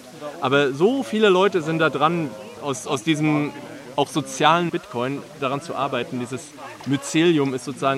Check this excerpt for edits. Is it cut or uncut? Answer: cut